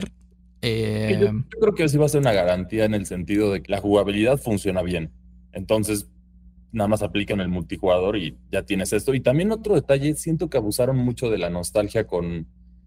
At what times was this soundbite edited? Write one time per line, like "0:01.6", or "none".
0:03.6
0:07.3